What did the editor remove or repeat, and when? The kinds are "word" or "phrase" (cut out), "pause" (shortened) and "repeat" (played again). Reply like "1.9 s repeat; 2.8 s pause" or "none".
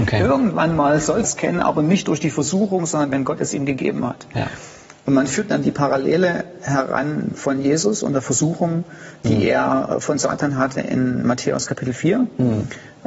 1.2 s word